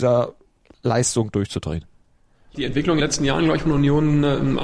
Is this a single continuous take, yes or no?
no